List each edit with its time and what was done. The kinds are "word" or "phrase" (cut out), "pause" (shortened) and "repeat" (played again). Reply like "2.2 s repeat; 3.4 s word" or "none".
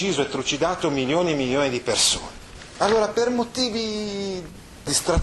none